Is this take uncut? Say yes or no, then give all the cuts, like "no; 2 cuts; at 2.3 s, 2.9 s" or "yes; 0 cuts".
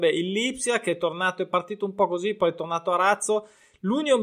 yes; 0 cuts